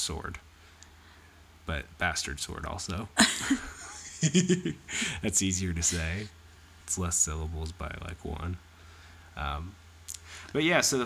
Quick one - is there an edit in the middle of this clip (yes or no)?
no